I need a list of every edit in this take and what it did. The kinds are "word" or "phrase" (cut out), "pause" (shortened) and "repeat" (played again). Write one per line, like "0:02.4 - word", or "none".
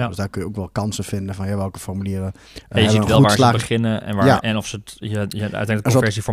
0:02.4 - pause

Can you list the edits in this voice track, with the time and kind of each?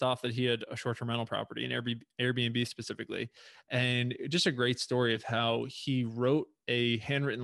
none

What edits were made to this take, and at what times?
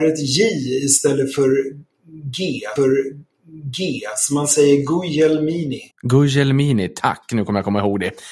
0:02.8 - repeat
0:05.9 - pause

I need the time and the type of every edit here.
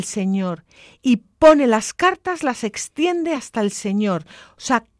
none

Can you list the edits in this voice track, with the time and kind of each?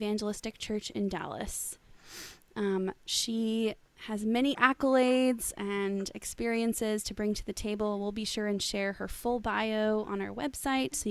0:03.0 - pause
0:04.5 - word

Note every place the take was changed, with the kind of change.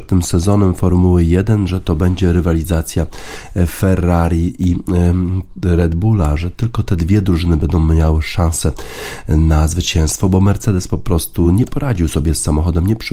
none

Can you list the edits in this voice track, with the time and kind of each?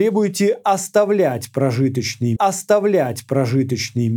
0:02.4 - repeat

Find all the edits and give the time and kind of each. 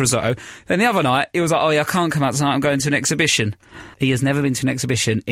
0:03.9 - pause

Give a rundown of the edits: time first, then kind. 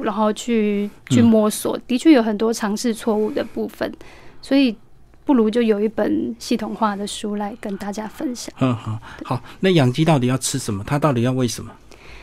none

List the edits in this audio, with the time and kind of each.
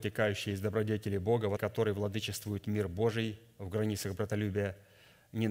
0:01.6 - word

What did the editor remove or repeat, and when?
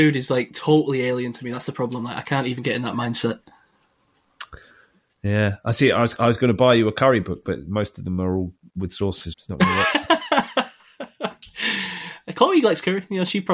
0:09.3 - word

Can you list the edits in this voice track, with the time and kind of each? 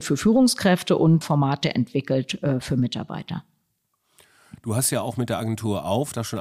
0:01.2 - word

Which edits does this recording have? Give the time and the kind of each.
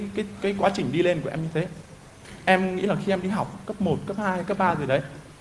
none

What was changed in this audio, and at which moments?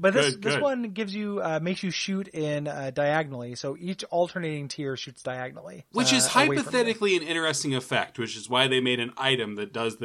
0:05.9 - pause

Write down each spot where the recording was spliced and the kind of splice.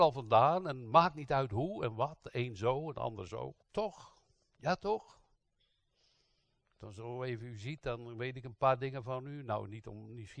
0:03.6 - pause

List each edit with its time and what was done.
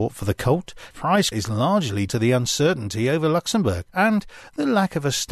0:00.9 - word
0:01.3 - word
0:02.1 - word
0:03.9 - pause

